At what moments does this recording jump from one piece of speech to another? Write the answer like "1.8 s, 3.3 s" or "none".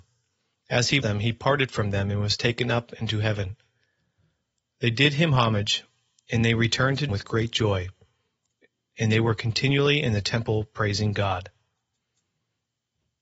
1.0 s, 7.1 s